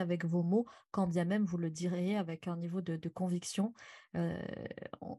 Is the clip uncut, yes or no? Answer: yes